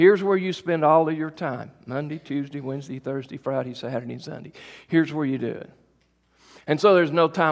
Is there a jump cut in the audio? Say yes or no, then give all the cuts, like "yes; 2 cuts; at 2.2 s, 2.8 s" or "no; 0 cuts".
no; 0 cuts